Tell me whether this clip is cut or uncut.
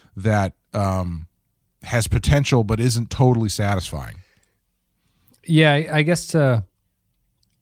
uncut